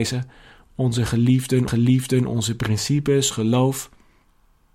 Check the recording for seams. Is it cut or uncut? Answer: cut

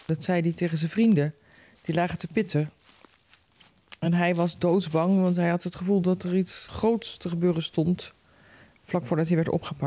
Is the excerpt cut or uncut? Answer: uncut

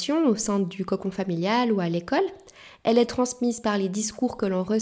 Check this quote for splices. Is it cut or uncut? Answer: uncut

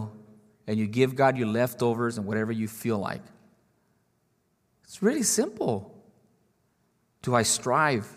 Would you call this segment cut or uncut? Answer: uncut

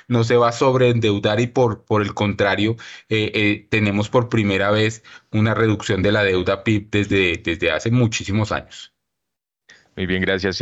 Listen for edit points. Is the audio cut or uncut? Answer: uncut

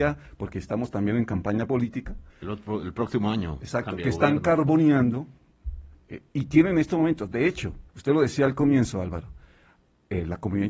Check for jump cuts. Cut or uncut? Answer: cut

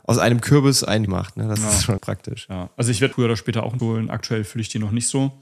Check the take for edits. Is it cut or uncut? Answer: cut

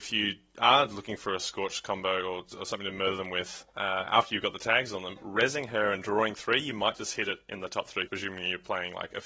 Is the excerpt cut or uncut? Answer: cut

